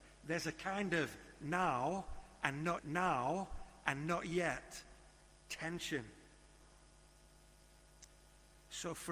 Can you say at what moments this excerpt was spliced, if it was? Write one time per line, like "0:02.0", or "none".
0:02.8